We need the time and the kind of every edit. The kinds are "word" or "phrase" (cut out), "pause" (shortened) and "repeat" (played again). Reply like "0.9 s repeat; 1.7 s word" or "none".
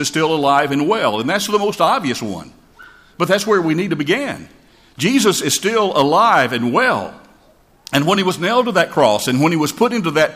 none